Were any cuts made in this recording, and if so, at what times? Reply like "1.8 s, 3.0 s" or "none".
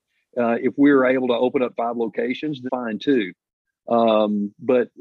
1.8 s, 2.7 s